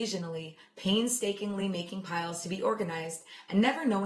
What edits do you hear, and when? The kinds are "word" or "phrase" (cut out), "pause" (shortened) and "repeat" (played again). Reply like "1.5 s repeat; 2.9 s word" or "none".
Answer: none